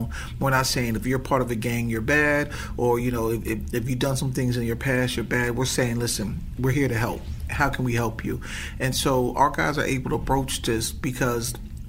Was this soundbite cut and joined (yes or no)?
no